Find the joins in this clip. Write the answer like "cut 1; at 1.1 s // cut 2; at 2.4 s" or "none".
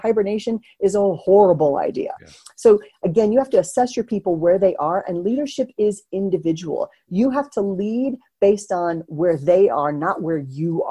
none